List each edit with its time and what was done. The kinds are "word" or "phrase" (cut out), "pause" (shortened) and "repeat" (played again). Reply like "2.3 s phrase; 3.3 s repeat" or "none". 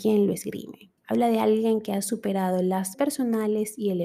1.0 s pause; 2.9 s word